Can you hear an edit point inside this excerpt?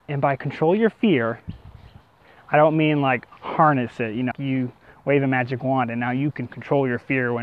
yes; 1 cut; at 4.3 s

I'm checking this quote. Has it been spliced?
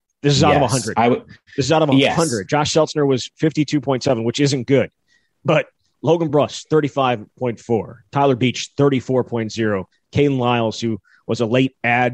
no; 0 cuts

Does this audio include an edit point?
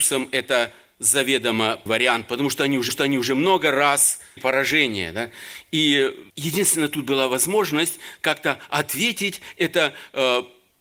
yes; 4 cuts; at 1.9 s, 2.9 s, 4.4 s, 6.3 s

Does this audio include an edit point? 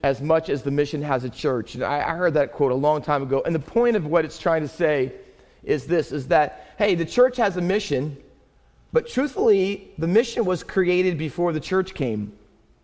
no; 0 cuts

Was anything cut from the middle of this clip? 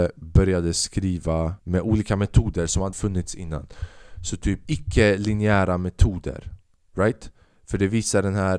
yes; 4 cuts; at 1.6 s, 2.9 s, 4.7 s, 6.6 s

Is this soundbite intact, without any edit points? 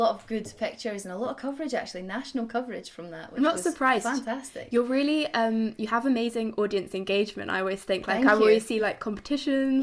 yes; 0 cuts

